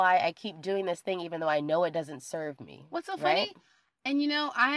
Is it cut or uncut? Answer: uncut